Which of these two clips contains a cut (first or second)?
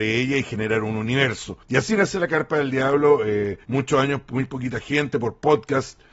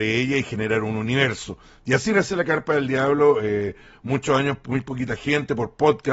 first